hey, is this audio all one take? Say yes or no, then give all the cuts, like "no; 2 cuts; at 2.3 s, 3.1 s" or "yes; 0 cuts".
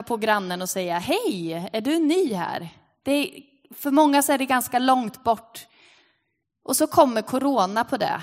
yes; 0 cuts